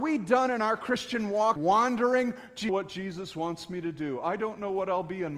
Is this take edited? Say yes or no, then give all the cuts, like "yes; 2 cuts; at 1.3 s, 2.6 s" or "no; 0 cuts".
yes; 2 cuts; at 1.6 s, 2.7 s